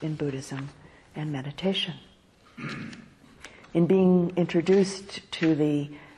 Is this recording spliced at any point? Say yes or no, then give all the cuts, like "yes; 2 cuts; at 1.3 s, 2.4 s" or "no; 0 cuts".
no; 0 cuts